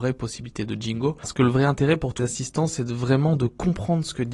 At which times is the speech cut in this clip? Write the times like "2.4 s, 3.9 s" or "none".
2.2 s